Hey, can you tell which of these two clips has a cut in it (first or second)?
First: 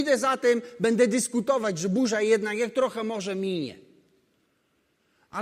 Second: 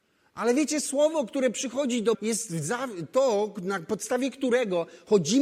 second